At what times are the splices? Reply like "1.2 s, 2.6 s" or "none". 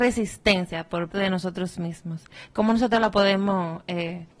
1.1 s